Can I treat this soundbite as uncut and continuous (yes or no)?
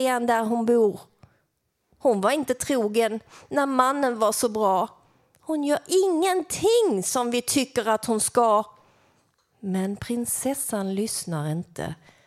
yes